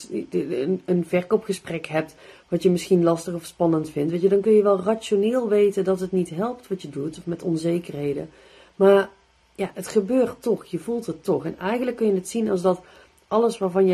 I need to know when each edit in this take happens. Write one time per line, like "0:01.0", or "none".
none